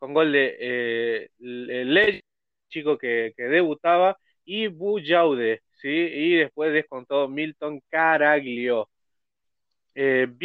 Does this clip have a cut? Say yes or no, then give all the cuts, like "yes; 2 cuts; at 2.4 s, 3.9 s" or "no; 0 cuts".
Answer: no; 0 cuts